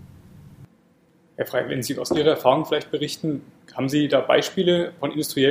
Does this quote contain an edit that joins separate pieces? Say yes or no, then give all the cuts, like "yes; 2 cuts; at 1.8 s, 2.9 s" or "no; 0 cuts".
no; 0 cuts